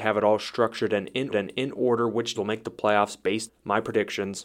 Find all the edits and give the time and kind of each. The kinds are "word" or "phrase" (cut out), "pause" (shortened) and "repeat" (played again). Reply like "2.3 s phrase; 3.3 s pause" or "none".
1.3 s repeat; 2.3 s word; 3.5 s word